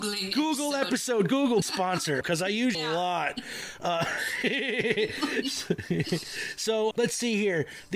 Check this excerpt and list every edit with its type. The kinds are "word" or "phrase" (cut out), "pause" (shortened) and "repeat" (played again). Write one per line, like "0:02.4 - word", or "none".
0:01.6 - word
0:02.2 - word
0:02.7 - word
0:06.9 - word